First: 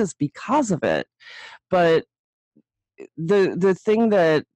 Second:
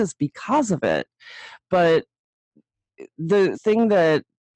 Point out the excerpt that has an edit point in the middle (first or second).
second